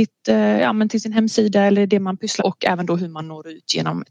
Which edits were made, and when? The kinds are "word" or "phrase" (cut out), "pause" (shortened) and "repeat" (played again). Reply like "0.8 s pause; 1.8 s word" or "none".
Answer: 2.4 s word

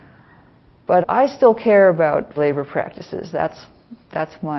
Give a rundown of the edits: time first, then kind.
1.0 s word; 2.4 s word

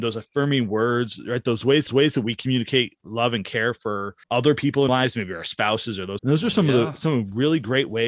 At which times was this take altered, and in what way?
1.9 s repeat; 4.2 s pause; 4.9 s word; 6.2 s phrase

